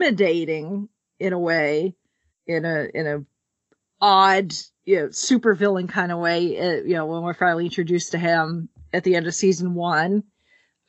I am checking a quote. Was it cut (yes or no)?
yes